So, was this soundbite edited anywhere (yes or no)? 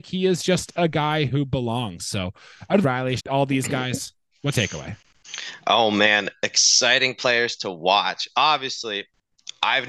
yes